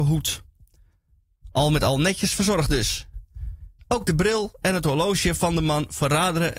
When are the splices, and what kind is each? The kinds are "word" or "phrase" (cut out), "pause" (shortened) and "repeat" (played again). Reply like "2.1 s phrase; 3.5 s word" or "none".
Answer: none